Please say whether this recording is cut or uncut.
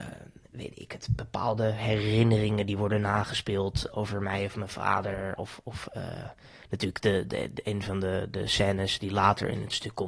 uncut